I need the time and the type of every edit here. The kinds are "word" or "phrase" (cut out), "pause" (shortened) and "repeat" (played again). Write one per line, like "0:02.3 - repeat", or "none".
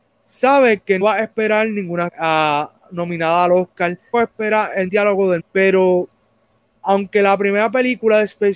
0:01.0 - word
0:02.1 - word
0:04.1 - word
0:04.9 - word
0:05.4 - word